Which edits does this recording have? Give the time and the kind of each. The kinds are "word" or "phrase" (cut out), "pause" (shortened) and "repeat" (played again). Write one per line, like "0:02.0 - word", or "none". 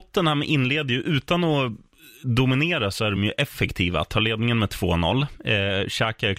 none